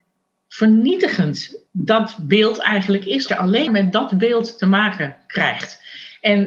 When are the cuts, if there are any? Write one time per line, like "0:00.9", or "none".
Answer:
0:01.7
0:03.3
0:03.7